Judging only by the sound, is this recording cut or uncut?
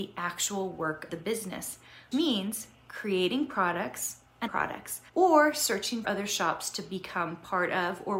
cut